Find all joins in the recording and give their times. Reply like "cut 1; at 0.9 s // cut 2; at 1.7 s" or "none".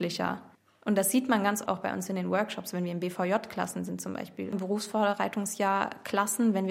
cut 1; at 1.7 s